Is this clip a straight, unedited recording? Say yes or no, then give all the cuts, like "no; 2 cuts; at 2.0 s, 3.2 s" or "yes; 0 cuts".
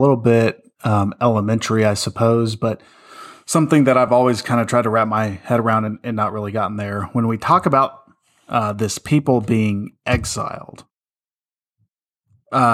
yes; 0 cuts